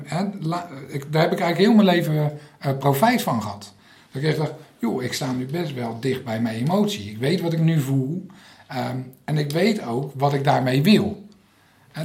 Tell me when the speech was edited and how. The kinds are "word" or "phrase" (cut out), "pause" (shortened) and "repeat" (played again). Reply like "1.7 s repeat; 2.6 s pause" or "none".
none